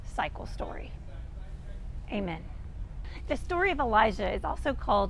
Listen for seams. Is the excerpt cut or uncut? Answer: uncut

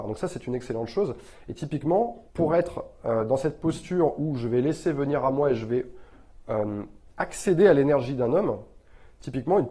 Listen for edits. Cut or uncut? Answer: cut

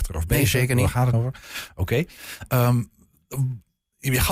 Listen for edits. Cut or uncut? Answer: cut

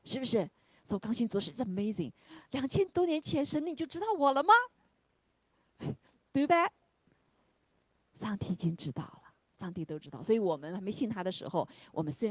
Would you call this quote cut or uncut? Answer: cut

